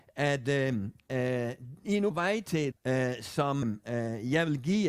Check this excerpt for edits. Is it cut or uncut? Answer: cut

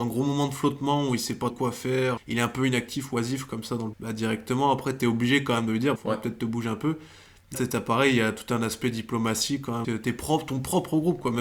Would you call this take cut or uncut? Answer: cut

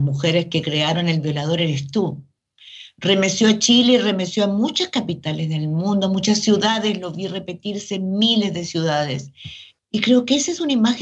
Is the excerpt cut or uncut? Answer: uncut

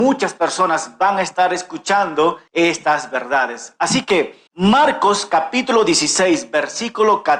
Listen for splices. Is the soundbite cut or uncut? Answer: cut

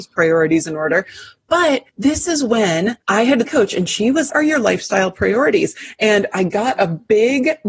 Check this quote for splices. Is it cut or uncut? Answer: cut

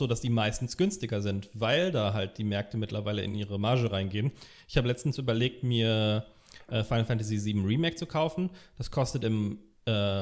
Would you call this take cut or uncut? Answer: uncut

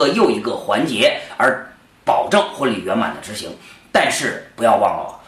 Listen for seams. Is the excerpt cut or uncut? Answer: uncut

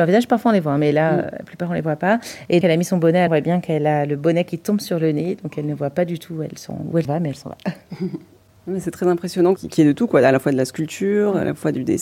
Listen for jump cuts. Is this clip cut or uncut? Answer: cut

